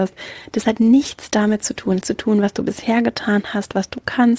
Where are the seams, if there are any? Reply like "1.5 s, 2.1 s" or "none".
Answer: 2.0 s